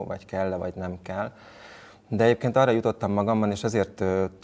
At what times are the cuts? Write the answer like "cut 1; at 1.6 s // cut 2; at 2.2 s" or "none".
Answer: none